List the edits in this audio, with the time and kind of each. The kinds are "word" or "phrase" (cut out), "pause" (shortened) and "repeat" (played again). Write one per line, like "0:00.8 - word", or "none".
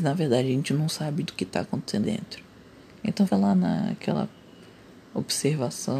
0:01.3 - word
0:02.0 - word
0:03.3 - word